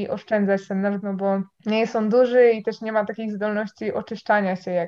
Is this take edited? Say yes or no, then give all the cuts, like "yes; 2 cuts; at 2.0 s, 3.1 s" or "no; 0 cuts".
yes; 2 cuts; at 1.0 s, 1.5 s